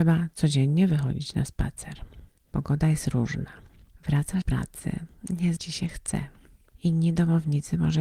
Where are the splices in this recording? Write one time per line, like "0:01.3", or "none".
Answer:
0:04.4
0:05.6

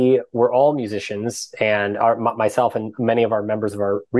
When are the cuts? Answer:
none

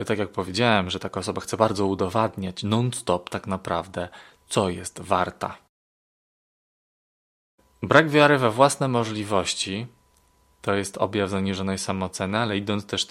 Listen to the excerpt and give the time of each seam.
none

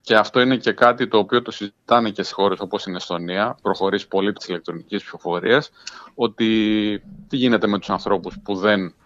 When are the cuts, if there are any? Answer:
0:02.3
0:03.6
0:04.4

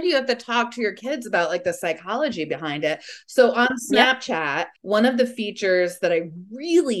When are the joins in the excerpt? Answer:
0:04.8

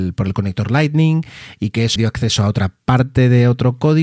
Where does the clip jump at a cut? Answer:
0:02.0

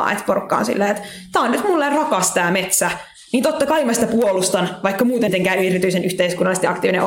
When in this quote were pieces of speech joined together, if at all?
0:05.3

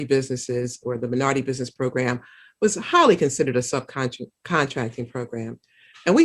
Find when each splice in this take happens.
none

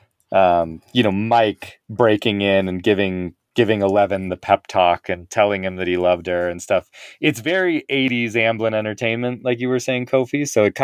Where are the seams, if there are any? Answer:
none

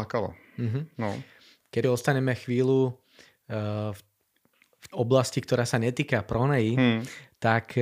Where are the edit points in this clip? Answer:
0:01.8
0:04.9

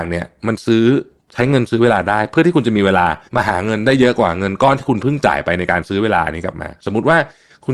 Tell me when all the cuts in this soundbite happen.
0:01.2
0:03.3

